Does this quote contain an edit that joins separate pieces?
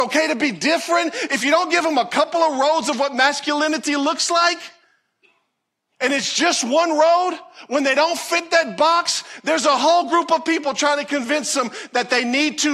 no; 0 cuts

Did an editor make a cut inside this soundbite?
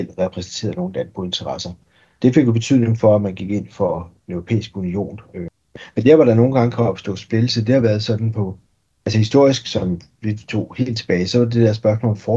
no; 0 cuts

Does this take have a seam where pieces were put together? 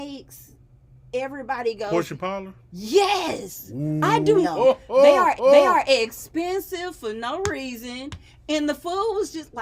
yes; 2 cuts; at 4.4 s, 5.4 s

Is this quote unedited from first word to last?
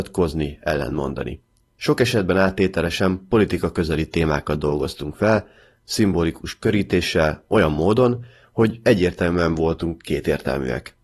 yes; 0 cuts

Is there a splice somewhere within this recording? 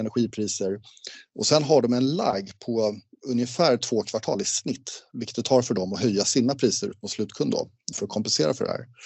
yes; 1 cut; at 7.9 s

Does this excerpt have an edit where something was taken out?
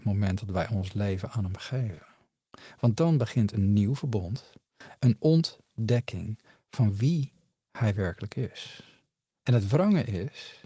no; 0 cuts

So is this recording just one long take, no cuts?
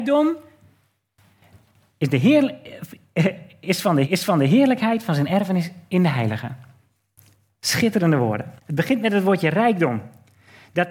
no; 2 cuts; at 4.0 s, 8.6 s

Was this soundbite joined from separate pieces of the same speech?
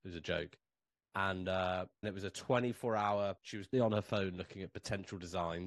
yes; 3 cuts; at 2.0 s, 3.4 s, 3.7 s

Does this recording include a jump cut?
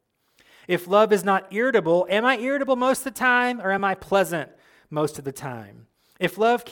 no; 0 cuts

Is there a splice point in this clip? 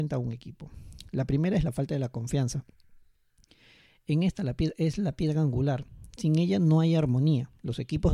no; 0 cuts

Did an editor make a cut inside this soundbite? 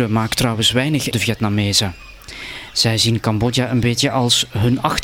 yes; 1 cut; at 1.1 s

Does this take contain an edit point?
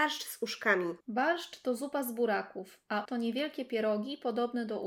yes; 2 cuts; at 1.0 s, 3.1 s

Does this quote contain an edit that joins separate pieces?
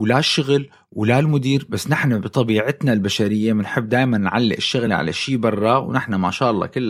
no; 0 cuts

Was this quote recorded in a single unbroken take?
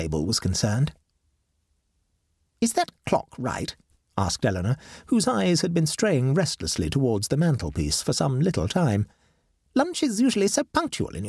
yes; 0 cuts

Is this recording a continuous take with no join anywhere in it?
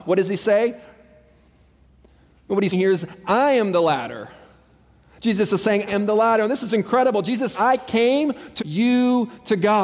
no; 4 cuts; at 2.7 s, 5.9 s, 7.5 s, 8.6 s

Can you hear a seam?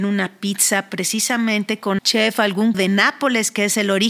yes; 2 cuts; at 2.0 s, 2.7 s

